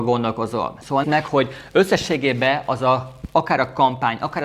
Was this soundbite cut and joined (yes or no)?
yes